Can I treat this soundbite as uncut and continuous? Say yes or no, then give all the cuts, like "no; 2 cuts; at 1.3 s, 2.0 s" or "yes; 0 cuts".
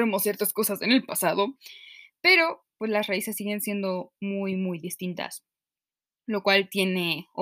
yes; 0 cuts